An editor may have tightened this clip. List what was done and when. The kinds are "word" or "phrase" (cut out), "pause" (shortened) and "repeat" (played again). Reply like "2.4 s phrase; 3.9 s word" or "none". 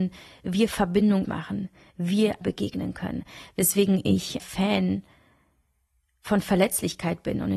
1.2 s phrase; 2.4 s word; 4.4 s phrase